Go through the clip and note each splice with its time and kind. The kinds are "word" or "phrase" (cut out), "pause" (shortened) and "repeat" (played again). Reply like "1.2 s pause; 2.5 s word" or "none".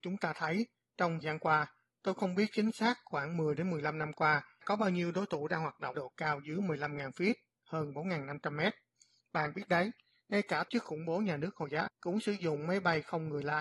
1.2 s word; 4.6 s word; 5.9 s word; 10.7 s word; 11.9 s word